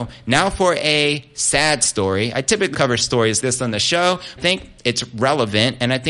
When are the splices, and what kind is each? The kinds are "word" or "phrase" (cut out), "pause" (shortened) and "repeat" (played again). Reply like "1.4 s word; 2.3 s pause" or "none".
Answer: 2.7 s word; 3.4 s word; 4.4 s phrase